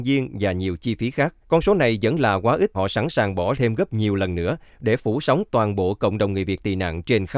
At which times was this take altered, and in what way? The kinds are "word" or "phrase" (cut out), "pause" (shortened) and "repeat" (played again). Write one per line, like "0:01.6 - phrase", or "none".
0:01.4 - pause
0:02.7 - word
0:03.5 - word